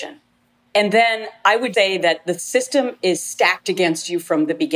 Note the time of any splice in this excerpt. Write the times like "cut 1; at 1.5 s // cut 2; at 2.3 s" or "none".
cut 1; at 1.7 s